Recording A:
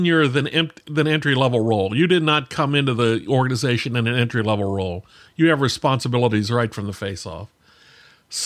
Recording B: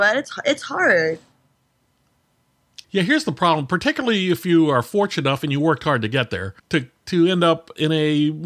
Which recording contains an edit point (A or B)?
B